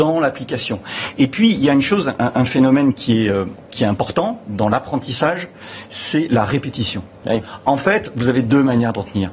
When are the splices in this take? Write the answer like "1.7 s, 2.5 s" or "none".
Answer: none